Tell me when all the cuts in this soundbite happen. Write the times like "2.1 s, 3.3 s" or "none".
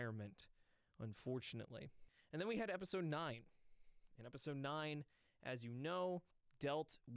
none